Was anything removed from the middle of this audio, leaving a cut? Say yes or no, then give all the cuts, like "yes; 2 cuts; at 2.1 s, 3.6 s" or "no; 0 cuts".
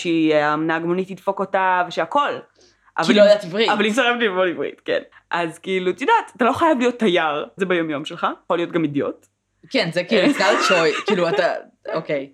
yes; 3 cuts; at 5.1 s, 7.6 s, 8.5 s